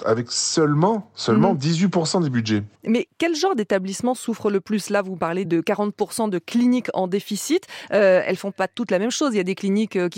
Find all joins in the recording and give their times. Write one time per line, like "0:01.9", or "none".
0:02.7
0:05.4